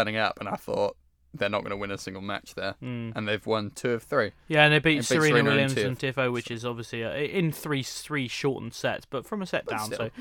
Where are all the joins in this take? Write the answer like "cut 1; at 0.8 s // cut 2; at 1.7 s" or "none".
cut 1; at 6.0 s